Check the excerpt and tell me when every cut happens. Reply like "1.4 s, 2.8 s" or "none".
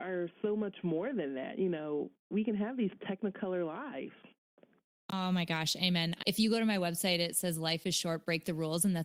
6.2 s